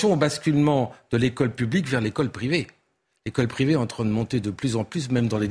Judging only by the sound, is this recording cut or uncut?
uncut